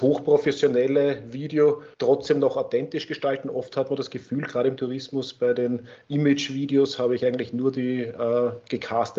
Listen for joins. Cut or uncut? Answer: cut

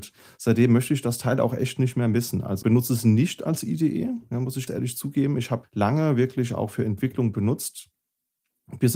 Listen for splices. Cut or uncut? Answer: cut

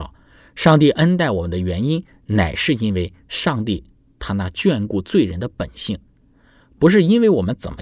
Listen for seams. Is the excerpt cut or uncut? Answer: uncut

